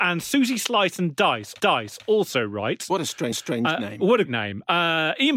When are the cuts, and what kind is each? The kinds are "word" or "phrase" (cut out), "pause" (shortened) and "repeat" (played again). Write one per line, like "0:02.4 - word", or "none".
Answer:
0:01.6 - repeat
0:03.3 - repeat
0:04.3 - word